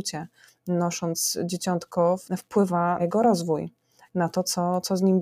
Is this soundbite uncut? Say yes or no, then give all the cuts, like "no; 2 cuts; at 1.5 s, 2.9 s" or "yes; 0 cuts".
no; 2 cuts; at 2.2 s, 3.0 s